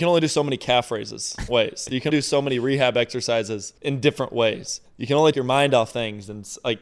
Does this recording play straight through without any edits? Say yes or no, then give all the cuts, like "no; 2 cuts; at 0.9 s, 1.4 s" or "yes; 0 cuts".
no; 5 cuts; at 1.5 s, 2.1 s, 3.8 s, 4.9 s, 5.3 s